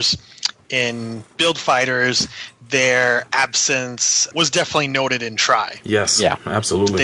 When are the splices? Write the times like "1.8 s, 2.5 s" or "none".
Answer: 4.3 s